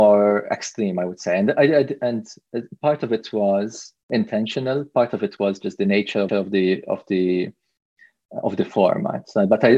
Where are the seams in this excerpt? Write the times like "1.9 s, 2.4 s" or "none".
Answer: 6.3 s